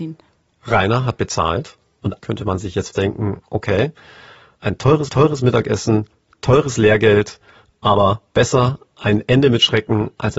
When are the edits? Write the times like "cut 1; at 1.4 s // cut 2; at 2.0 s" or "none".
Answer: cut 1; at 2.2 s // cut 2; at 2.9 s // cut 3; at 5.1 s // cut 4; at 8.3 s